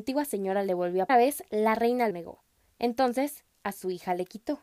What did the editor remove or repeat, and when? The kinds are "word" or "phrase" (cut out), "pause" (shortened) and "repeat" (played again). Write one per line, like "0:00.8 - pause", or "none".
0:01.1 - phrase
0:02.1 - word